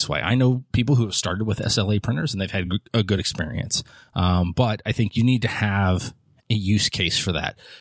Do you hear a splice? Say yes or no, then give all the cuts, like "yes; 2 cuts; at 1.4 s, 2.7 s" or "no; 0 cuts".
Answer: no; 0 cuts